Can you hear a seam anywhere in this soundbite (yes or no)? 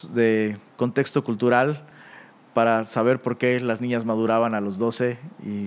no